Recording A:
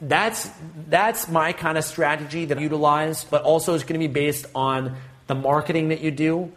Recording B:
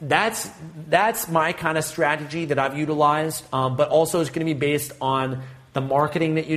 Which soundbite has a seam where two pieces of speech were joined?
A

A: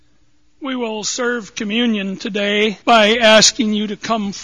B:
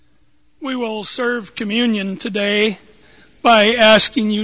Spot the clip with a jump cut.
A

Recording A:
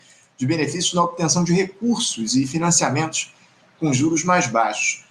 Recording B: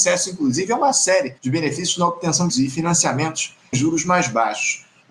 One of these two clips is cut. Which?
B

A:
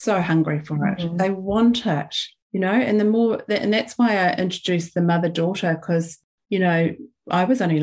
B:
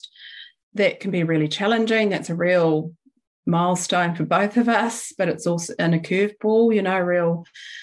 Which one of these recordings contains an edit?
A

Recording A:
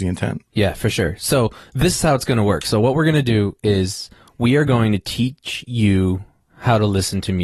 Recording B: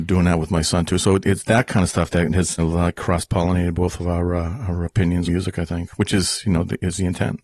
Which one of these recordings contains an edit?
B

